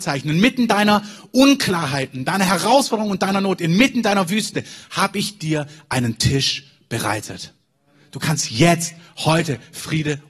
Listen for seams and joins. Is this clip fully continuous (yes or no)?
yes